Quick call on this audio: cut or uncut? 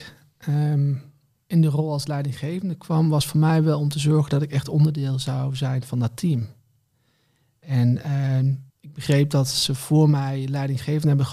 cut